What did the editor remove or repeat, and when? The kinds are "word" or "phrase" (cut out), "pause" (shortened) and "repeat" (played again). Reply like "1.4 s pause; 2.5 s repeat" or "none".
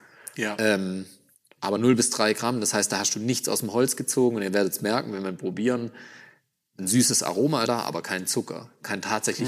7.7 s word